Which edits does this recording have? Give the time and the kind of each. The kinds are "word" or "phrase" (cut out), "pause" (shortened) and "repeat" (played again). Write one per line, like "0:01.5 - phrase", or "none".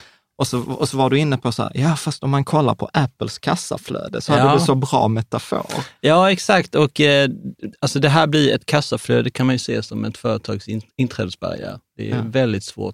none